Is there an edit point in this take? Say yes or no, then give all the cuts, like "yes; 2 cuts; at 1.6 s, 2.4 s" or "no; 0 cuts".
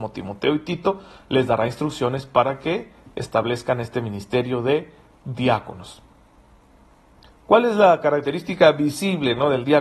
no; 0 cuts